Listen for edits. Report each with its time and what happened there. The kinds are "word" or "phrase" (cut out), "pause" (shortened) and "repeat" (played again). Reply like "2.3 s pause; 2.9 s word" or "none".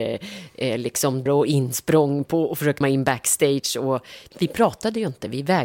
1.3 s word; 2.8 s word; 4.3 s word